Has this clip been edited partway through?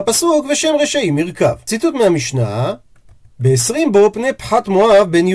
no; 0 cuts

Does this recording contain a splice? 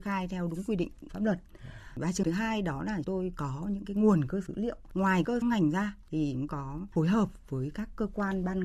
yes; 6 cuts; at 1.1 s, 2.2 s, 3.0 s, 4.5 s, 5.4 s, 6.5 s

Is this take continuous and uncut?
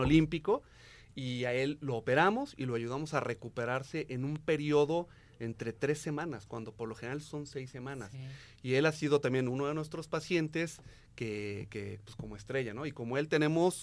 yes; 0 cuts

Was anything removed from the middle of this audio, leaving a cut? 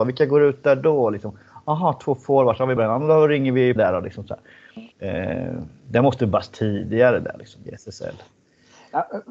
yes; 4 cuts; at 2.8 s, 3.8 s, 4.9 s, 7.7 s

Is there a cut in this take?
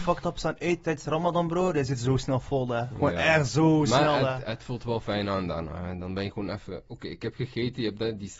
no; 0 cuts

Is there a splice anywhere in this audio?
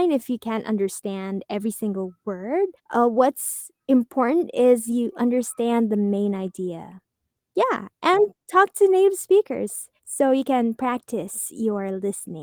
yes; 3 cuts; at 2.8 s, 7.3 s, 10.0 s

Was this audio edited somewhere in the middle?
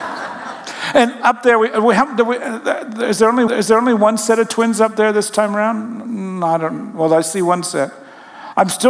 yes; 1 cut; at 3.5 s

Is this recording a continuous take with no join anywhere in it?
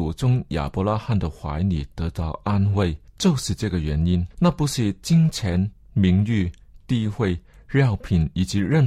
no; 2 cuts; at 3.1 s, 4.3 s

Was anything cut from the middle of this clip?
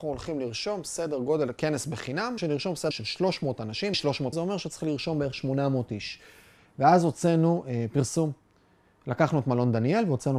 yes; 4 cuts; at 2.4 s, 2.9 s, 3.9 s, 4.3 s

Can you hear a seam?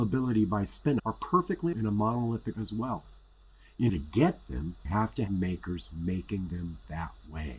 yes; 6 cuts; at 1.0 s, 1.7 s, 2.5 s, 3.9 s, 4.8 s, 5.3 s

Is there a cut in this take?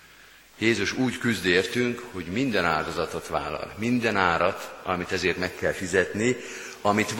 no; 0 cuts

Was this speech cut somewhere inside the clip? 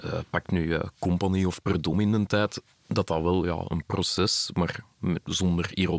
no; 0 cuts

